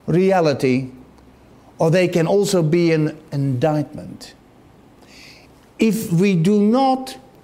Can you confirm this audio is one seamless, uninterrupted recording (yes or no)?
yes